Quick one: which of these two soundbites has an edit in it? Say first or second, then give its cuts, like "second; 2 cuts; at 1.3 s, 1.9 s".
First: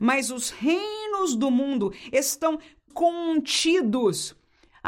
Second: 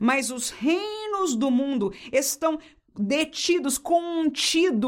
first; 1 cut; at 2.9 s